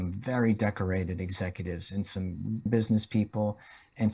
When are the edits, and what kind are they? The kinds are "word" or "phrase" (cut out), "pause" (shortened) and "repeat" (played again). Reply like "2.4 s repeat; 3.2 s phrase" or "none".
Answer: 2.7 s word